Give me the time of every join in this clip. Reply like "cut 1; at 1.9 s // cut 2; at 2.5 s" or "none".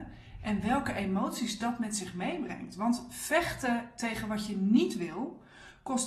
none